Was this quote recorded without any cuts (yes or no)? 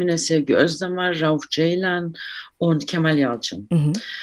yes